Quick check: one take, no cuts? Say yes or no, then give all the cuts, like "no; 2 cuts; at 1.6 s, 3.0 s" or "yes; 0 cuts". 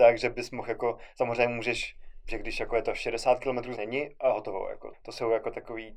no; 3 cuts; at 2.2 s, 3.7 s, 4.9 s